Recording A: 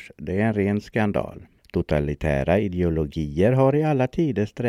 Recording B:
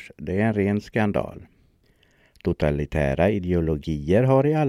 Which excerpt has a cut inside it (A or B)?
A